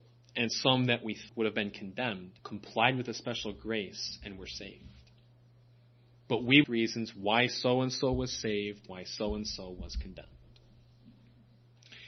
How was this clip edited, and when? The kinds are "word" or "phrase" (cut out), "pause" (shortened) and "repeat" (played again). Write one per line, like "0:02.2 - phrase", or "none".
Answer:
0:01.3 - word
0:02.4 - pause
0:06.6 - phrase
0:08.9 - word